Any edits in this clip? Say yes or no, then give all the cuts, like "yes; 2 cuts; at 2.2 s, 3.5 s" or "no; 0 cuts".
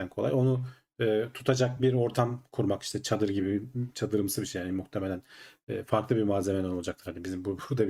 no; 0 cuts